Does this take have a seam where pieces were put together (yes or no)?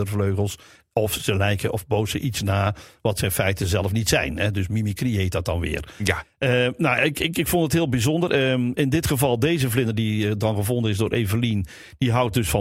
no